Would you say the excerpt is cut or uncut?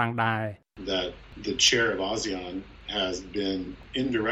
uncut